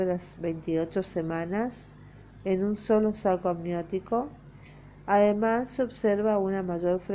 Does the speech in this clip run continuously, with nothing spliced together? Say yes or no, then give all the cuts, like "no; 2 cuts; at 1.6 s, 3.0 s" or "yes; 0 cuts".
yes; 0 cuts